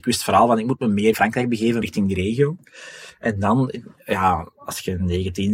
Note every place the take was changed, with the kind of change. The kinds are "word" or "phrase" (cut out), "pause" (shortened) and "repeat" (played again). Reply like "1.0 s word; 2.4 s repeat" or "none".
1.1 s word; 1.8 s word